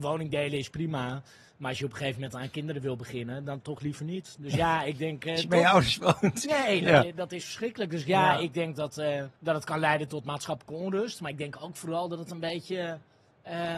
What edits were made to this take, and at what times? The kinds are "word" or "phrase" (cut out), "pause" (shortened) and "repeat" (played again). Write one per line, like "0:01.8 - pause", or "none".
0:09.4 - pause